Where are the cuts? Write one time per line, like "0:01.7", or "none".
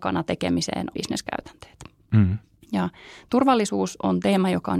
0:00.9
0:02.6